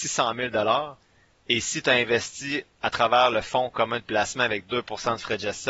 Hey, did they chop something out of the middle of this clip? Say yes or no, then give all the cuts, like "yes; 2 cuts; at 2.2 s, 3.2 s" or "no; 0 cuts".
no; 0 cuts